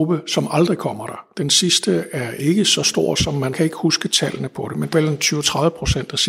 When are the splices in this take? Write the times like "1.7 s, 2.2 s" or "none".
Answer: 3.5 s, 4.9 s